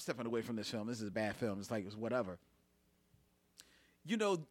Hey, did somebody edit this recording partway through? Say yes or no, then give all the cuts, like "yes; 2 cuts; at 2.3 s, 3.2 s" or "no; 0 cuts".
no; 0 cuts